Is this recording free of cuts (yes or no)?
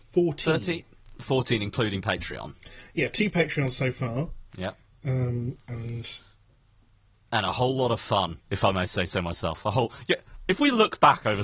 no